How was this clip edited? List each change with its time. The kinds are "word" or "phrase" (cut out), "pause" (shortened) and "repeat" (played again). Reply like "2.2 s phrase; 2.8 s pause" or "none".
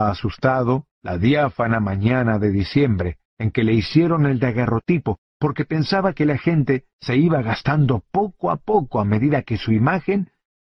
0.9 s pause; 3.3 s pause